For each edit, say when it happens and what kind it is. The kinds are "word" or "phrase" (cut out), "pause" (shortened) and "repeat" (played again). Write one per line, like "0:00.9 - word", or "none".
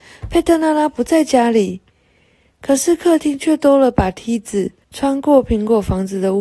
0:04.8 - pause